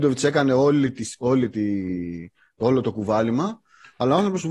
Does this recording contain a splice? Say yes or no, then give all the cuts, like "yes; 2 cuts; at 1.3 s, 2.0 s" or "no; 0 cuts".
no; 0 cuts